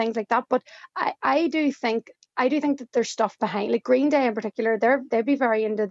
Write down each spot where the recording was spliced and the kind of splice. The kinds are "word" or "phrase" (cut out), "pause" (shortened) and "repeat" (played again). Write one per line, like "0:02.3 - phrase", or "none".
none